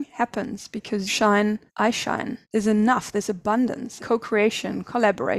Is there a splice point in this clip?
yes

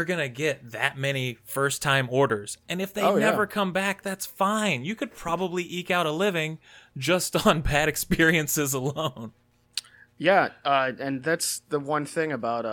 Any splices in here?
no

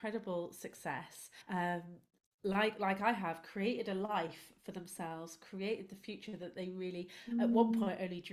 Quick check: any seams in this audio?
yes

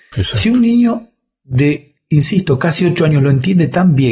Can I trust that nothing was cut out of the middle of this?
yes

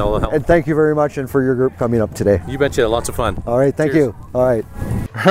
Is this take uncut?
yes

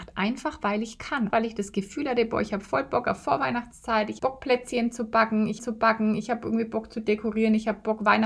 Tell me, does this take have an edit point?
yes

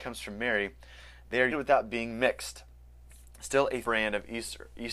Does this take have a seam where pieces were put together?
yes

